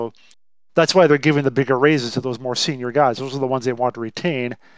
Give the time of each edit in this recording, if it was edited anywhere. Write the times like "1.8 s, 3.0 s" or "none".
none